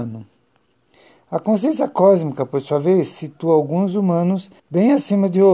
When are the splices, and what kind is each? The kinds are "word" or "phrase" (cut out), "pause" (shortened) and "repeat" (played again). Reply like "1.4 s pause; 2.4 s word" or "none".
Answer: 4.6 s pause